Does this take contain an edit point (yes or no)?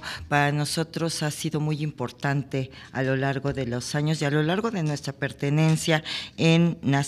no